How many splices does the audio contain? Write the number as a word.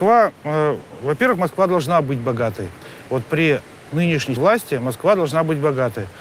one